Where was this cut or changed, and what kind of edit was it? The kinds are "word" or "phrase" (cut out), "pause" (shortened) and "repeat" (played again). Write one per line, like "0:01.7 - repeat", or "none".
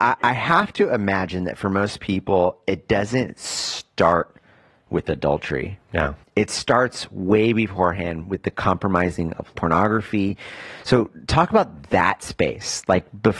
0:09.5 - word